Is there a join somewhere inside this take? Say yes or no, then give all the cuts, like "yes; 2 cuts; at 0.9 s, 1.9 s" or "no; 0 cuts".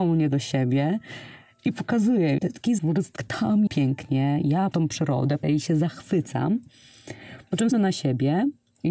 yes; 7 cuts; at 2.4 s, 2.8 s, 3.2 s, 3.7 s, 4.7 s, 5.4 s, 7.7 s